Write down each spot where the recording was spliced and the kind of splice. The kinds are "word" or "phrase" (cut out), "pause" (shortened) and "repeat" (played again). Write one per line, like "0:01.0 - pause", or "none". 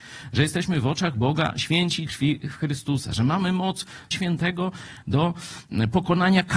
0:02.1 - word
0:04.1 - word